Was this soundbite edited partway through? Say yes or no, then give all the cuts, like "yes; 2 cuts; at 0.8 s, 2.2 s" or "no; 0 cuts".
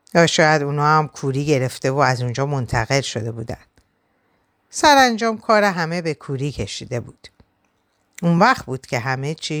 no; 0 cuts